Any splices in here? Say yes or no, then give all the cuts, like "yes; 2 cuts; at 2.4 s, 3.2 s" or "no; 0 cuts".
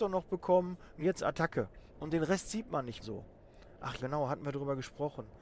yes; 4 cuts; at 1.0 s, 1.9 s, 3.0 s, 4.0 s